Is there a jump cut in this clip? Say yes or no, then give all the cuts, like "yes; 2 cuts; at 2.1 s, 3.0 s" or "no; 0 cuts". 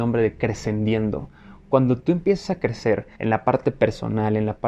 yes; 1 cut; at 3.1 s